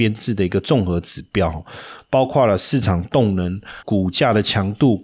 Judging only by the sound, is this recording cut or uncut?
cut